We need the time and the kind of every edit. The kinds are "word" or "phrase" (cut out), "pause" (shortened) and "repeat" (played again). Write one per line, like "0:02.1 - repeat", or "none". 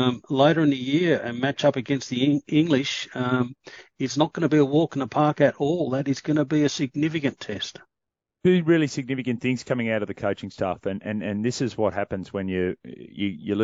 none